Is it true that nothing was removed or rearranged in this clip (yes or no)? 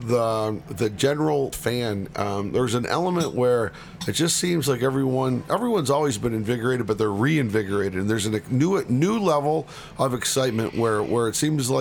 no